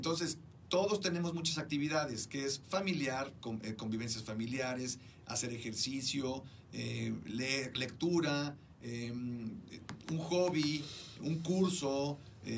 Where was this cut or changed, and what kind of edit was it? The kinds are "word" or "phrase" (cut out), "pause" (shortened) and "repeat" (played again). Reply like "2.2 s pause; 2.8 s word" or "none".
none